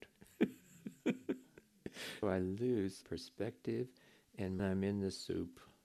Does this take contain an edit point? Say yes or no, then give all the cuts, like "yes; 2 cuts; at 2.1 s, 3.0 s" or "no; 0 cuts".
yes; 3 cuts; at 2.2 s, 3.0 s, 4.6 s